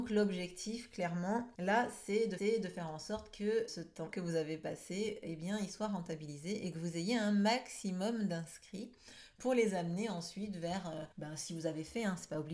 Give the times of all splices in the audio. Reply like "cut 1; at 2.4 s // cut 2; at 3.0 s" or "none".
cut 1; at 1.5 s // cut 2; at 2.4 s // cut 3; at 3.7 s // cut 4; at 4.1 s // cut 5; at 11.1 s